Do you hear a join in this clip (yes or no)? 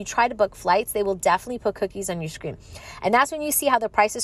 no